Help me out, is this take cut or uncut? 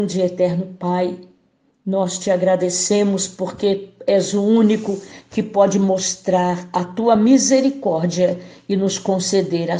uncut